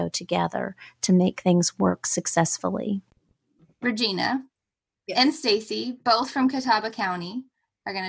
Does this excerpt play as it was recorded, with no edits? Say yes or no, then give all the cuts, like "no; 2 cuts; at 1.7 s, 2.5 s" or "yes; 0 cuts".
yes; 0 cuts